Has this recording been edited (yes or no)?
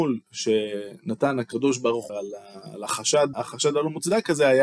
yes